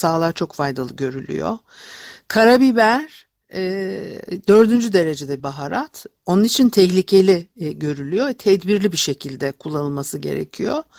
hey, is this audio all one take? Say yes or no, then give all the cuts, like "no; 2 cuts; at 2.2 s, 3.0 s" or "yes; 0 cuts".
no; 1 cut; at 5.4 s